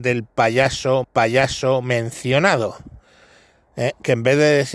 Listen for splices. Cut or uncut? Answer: cut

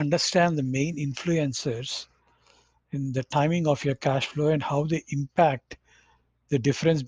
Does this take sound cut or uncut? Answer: uncut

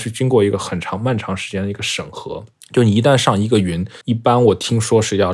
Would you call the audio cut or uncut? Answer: cut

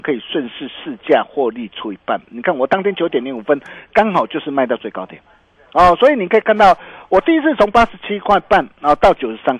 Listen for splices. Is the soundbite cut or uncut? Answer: uncut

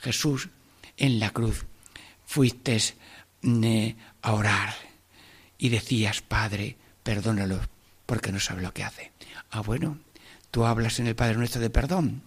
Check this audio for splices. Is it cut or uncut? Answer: uncut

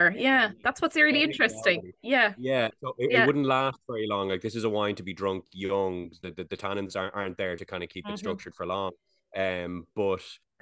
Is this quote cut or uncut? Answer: uncut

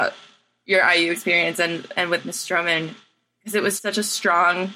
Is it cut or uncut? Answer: cut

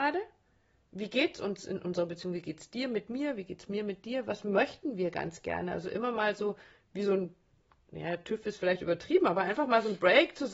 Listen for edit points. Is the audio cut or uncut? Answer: uncut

